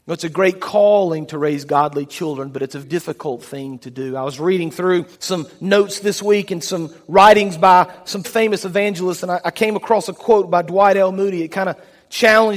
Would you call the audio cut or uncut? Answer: cut